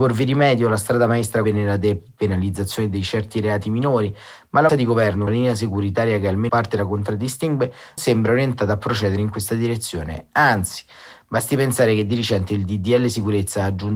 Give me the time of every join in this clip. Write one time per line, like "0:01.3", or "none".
0:01.4
0:04.7
0:05.3
0:06.5
0:08.0